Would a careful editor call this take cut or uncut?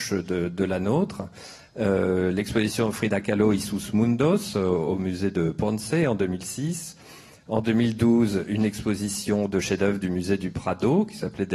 uncut